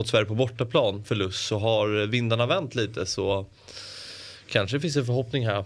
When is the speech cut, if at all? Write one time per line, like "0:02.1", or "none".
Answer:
0:01.0